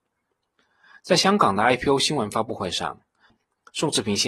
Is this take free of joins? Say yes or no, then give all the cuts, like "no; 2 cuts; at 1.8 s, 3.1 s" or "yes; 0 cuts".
yes; 0 cuts